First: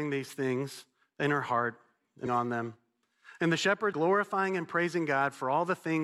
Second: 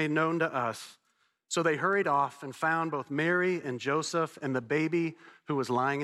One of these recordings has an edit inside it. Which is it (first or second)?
first